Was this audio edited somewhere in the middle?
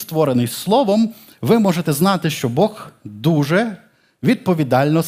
no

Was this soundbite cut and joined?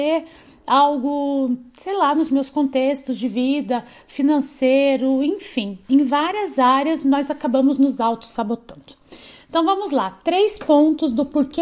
no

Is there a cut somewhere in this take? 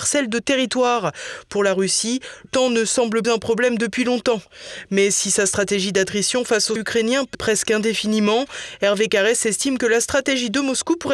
yes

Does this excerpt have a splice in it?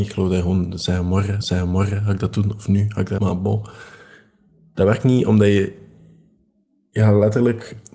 yes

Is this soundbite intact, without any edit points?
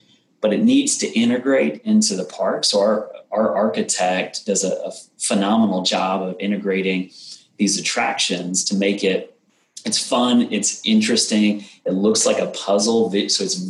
yes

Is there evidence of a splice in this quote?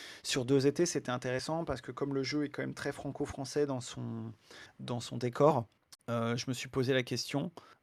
yes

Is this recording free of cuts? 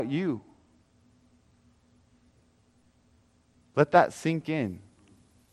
yes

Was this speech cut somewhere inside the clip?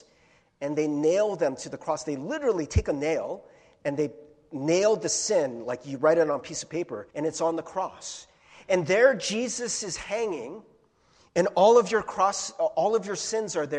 yes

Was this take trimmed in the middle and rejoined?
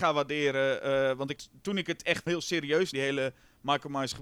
yes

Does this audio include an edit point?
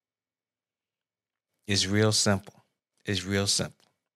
yes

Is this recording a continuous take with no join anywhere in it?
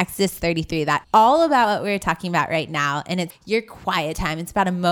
no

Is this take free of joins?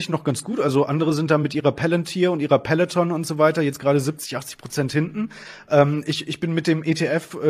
yes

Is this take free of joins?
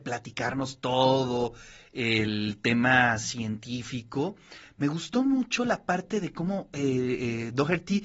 yes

